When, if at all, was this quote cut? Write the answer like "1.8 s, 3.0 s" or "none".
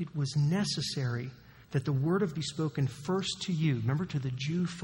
1.6 s, 2.3 s